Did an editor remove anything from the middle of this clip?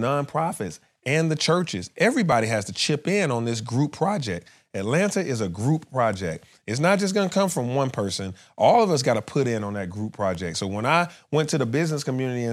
no; 0 cuts

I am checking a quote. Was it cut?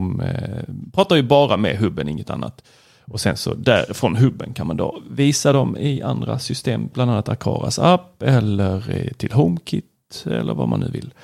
no; 0 cuts

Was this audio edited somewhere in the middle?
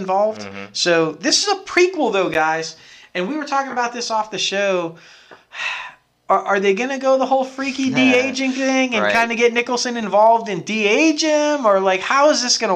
no; 0 cuts

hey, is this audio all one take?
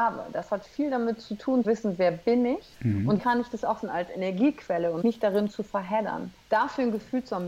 no; 6 cuts; at 1.6 s, 2.7 s, 3.2 s, 3.8 s, 5.0 s, 6.4 s

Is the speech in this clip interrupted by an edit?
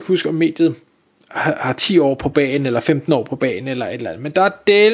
no; 0 cuts

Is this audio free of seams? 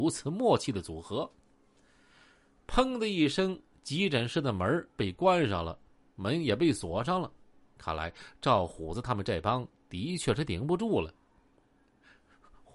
yes; 0 cuts

